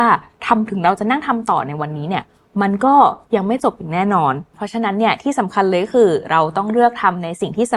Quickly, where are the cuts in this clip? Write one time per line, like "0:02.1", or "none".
none